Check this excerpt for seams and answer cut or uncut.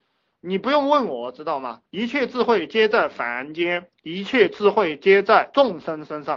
cut